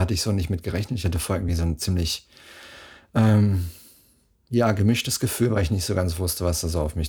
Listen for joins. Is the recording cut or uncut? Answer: uncut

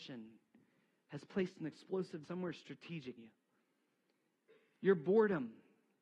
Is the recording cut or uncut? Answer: cut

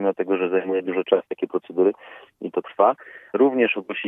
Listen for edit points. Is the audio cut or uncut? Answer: cut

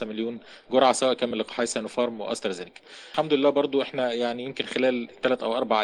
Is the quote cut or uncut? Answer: uncut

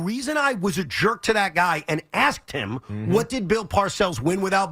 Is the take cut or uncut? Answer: uncut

